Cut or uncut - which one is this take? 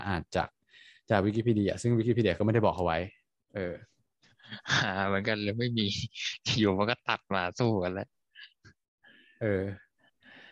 uncut